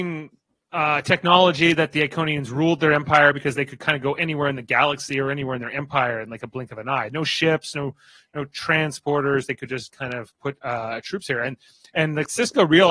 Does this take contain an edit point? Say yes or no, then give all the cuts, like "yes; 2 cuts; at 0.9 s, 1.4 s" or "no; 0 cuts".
no; 0 cuts